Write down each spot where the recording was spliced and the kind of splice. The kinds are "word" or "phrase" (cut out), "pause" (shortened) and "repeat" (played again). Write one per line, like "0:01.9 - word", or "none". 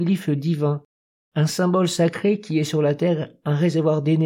none